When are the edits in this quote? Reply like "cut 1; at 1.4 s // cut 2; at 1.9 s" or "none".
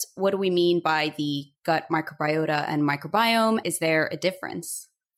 cut 1; at 3.6 s